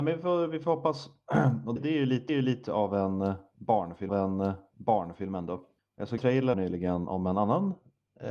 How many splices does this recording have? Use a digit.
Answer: 6